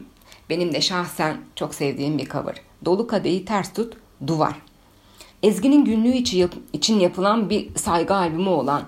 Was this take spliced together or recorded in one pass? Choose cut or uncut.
cut